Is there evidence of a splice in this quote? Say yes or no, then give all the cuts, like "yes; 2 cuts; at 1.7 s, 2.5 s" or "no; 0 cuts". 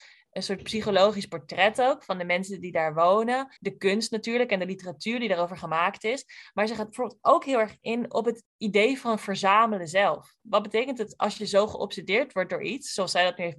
yes; 2 cuts; at 3.6 s, 8.4 s